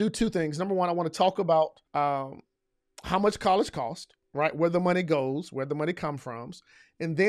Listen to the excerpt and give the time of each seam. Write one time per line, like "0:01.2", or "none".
0:01.9
0:04.2